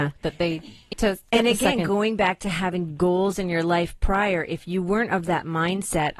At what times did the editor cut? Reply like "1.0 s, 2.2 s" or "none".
0.9 s